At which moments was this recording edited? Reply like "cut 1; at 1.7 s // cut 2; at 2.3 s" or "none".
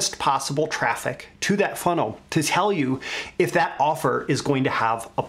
none